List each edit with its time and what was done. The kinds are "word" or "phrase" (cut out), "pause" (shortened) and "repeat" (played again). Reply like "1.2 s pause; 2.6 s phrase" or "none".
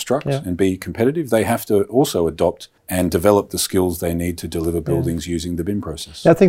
2.8 s pause